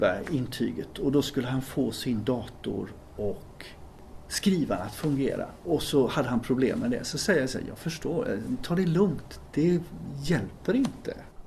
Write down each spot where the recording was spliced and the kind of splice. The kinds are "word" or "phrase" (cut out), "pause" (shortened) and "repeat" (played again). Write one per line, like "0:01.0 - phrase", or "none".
none